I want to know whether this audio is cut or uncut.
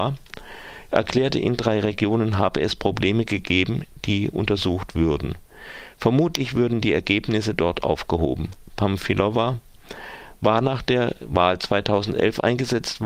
uncut